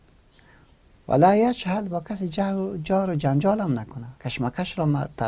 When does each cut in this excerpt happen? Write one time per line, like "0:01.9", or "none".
0:04.2

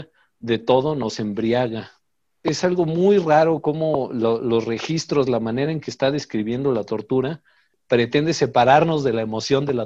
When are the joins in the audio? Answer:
none

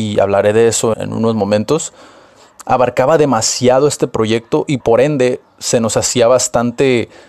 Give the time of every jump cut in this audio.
0:00.9
0:04.8

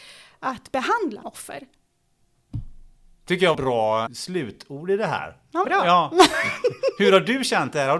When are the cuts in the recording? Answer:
0:01.2
0:03.5
0:04.1
0:05.6

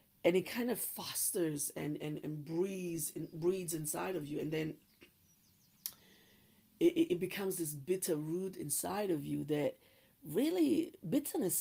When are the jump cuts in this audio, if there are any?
0:02.0

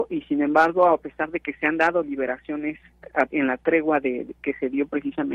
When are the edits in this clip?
0:03.3
0:04.3

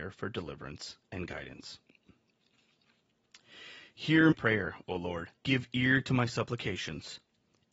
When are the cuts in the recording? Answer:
0:04.3
0:05.4

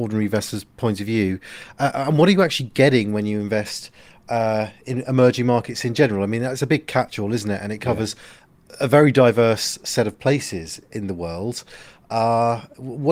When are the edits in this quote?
none

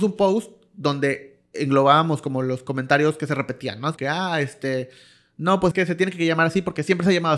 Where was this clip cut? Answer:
0:01.5
0:04.0
0:05.7

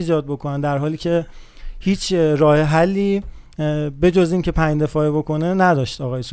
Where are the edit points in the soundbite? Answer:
none

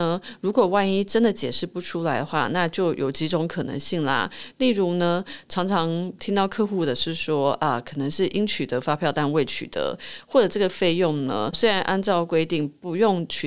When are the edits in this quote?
0:11.5

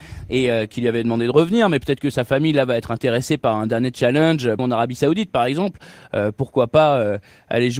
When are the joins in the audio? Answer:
0:04.6
0:05.3

